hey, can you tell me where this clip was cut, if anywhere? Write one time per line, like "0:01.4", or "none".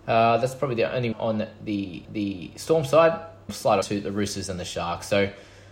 0:01.1
0:02.0
0:03.5
0:03.8